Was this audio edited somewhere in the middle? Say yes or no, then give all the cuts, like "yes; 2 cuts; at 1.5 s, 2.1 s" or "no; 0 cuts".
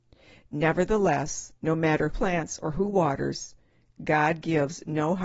yes; 2 cuts; at 1.6 s, 2.1 s